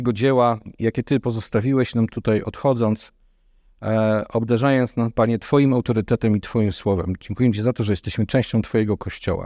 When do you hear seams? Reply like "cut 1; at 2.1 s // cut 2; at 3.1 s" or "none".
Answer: none